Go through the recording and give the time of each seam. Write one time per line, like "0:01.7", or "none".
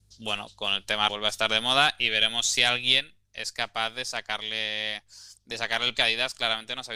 0:01.1
0:05.9